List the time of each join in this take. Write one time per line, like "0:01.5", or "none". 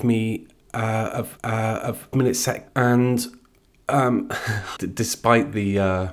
0:01.4
0:02.1
0:02.7
0:04.8